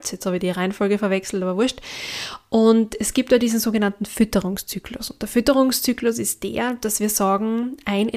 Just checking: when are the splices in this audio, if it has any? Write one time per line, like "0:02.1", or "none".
none